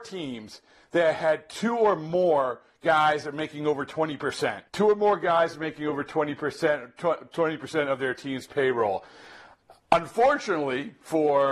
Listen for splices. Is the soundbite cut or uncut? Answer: cut